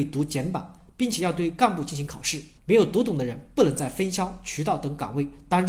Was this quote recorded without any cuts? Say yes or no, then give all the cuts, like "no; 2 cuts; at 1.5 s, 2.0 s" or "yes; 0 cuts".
no; 1 cut; at 2.6 s